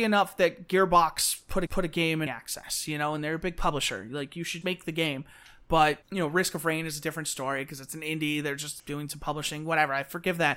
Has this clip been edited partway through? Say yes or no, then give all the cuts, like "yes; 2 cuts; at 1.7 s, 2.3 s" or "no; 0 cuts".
yes; 5 cuts; at 1.7 s, 2.3 s, 4.6 s, 6.0 s, 8.8 s